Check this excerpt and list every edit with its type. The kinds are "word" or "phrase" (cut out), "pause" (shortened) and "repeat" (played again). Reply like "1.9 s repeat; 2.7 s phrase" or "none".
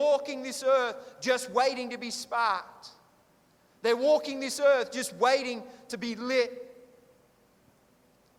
none